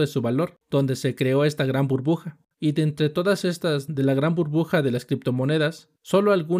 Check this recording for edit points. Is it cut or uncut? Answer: uncut